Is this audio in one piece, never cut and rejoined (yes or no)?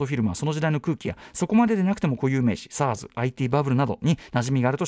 yes